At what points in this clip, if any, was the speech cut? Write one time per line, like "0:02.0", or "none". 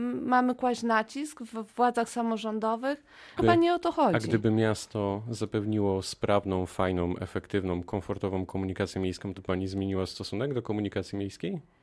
0:01.7
0:03.4
0:09.4